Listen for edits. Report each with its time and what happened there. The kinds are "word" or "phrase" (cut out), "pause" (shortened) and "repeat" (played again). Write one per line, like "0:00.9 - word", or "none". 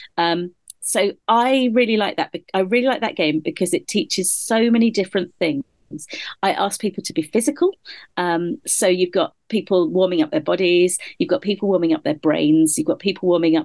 0:01.2 - pause